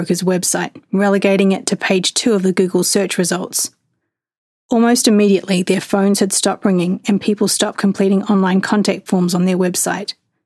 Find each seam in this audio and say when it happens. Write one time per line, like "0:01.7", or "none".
none